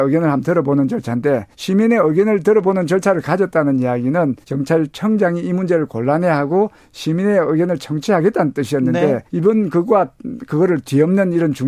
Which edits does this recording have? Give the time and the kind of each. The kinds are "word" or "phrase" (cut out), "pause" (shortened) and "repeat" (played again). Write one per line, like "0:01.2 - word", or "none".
0:01.5 - pause
0:04.4 - pause
0:09.3 - pause